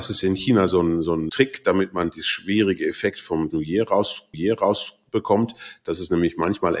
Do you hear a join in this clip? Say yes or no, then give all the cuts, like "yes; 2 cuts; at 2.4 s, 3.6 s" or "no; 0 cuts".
yes; 3 cuts; at 1.3 s, 3.5 s, 4.3 s